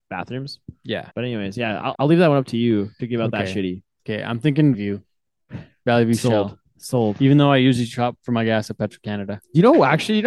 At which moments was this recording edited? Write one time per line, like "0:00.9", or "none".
0:01.1
0:01.9
0:04.7

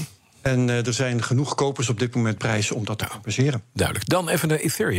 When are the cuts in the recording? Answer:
0:02.4

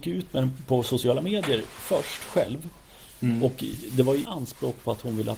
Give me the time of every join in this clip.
0:04.2

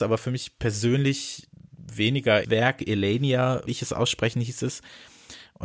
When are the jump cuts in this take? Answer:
0:02.4
0:03.7

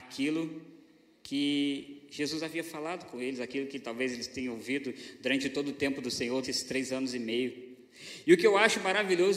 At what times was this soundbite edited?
0:06.4

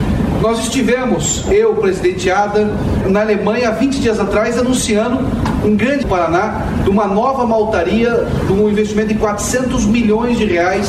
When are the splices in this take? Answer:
0:03.0
0:06.0

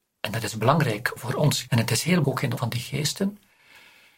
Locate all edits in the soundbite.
0:01.2
0:01.7
0:02.2
0:02.6

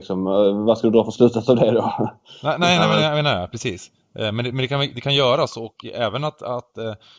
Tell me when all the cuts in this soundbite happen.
none

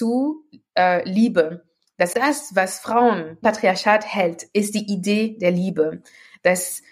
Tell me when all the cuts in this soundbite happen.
0:02.1
0:03.4

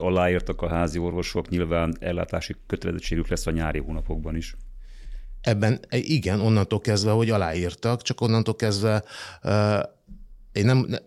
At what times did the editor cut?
none

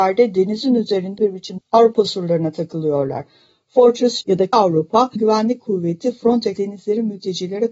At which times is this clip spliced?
0:01.2
0:01.6
0:04.2
0:04.5
0:05.2
0:06.6

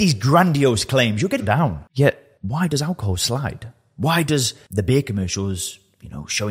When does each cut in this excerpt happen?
0:01.4

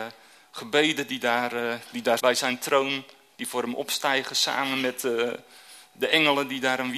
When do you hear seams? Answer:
0:02.2

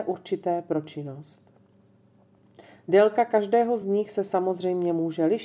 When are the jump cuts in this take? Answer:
none

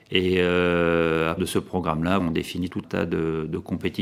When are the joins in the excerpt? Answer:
0:01.4
0:02.2
0:02.8

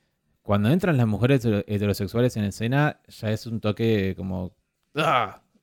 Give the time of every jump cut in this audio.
none

